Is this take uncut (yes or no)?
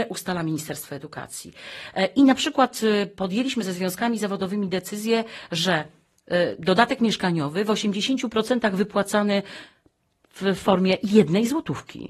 yes